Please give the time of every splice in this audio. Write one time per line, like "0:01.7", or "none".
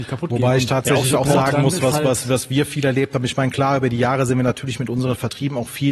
none